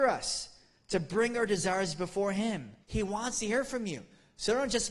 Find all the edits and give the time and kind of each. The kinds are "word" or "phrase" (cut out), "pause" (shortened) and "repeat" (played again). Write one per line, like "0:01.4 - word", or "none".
0:02.8 - pause